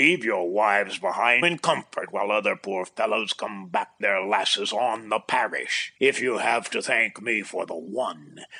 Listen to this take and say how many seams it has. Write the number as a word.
three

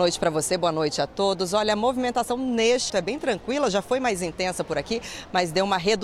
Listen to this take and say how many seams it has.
one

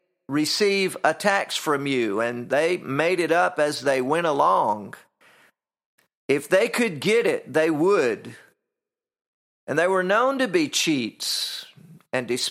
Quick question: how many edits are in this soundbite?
zero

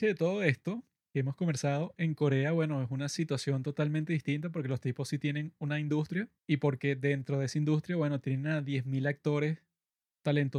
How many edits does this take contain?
one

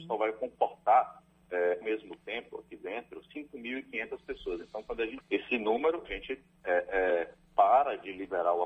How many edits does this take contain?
three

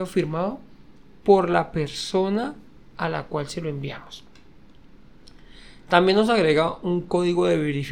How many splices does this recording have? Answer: zero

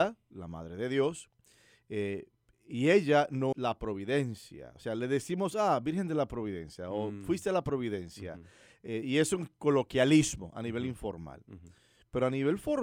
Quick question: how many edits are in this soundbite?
one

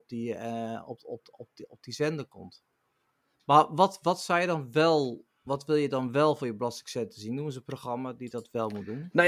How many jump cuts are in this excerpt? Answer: zero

